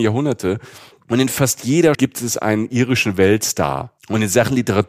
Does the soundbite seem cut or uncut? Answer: cut